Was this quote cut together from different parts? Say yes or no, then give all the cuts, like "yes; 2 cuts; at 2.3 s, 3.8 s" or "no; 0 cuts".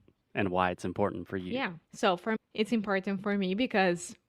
yes; 2 cuts; at 1.8 s, 2.4 s